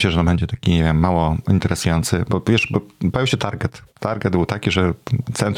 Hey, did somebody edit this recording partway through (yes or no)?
yes